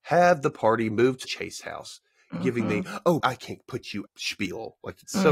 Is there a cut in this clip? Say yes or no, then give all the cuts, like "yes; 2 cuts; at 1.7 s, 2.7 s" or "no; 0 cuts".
yes; 3 cuts; at 1.2 s, 3.2 s, 4.1 s